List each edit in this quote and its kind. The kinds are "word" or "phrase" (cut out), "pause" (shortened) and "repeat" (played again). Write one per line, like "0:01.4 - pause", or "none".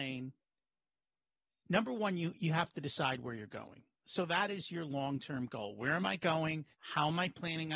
0:06.7 - pause